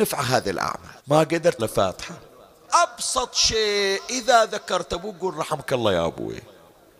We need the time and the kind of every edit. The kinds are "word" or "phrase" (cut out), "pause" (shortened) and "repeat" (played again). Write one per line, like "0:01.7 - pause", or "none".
0:01.0 - pause
0:01.6 - phrase
0:02.7 - phrase